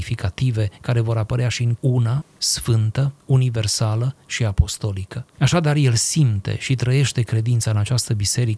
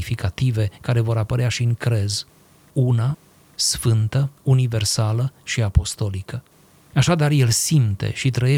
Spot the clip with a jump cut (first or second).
first